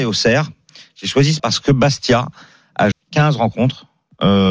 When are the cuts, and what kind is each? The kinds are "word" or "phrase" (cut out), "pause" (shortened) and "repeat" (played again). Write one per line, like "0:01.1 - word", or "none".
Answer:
0:01.4 - word
0:02.9 - word